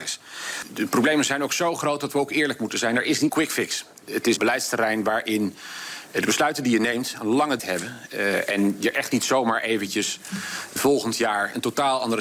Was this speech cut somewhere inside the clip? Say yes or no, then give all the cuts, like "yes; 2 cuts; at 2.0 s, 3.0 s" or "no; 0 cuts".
yes; 4 cuts; at 3.3 s, 4.4 s, 7.6 s, 10.8 s